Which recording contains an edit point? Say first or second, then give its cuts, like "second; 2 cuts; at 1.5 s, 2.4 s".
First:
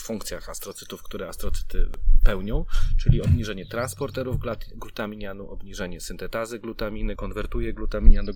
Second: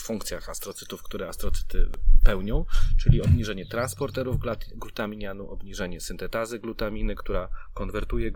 first; 1 cut; at 7.2 s